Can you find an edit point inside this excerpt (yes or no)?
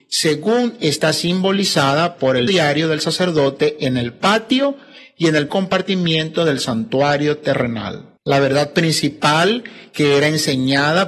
yes